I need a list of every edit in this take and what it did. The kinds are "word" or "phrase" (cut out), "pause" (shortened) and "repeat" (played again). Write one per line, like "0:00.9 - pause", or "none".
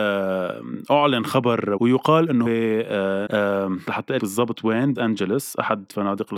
0:01.8 - word
0:02.5 - word
0:03.3 - word
0:03.9 - word
0:04.2 - word
0:05.0 - word